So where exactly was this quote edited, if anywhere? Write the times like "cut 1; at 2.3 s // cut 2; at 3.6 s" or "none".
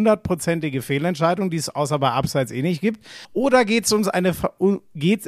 cut 1; at 3.2 s